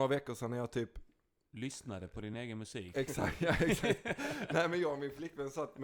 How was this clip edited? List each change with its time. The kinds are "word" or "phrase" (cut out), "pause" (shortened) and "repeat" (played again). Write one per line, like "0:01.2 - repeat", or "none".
none